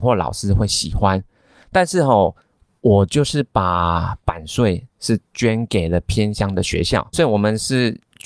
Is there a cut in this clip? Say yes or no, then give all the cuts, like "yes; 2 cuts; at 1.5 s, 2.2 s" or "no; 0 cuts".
yes; 1 cut; at 7.1 s